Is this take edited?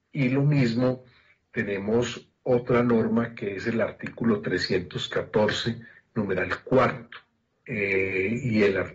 no; 0 cuts

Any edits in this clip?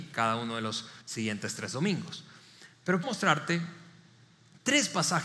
yes; 2 cuts; at 1.0 s, 3.0 s

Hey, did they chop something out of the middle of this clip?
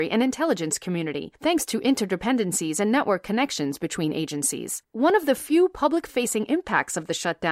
yes; 2 cuts; at 1.3 s, 4.8 s

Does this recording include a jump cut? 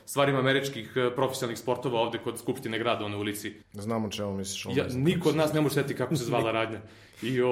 yes; 1 cut; at 3.6 s

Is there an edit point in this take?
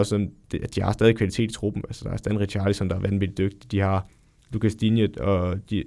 no; 0 cuts

